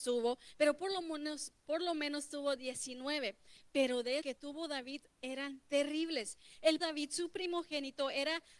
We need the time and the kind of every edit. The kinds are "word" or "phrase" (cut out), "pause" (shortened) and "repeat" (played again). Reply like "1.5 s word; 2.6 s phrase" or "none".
4.2 s phrase; 6.8 s phrase